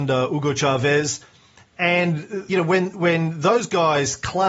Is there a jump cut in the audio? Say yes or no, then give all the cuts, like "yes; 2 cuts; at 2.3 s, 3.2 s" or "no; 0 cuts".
yes; 1 cut; at 2.5 s